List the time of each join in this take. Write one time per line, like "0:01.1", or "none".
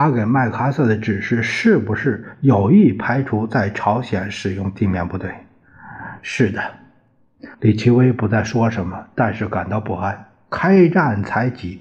0:07.5

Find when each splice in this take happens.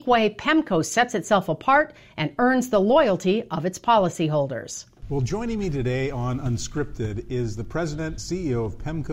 0:08.2

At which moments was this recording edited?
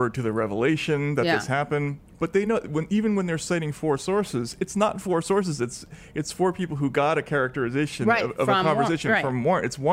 none

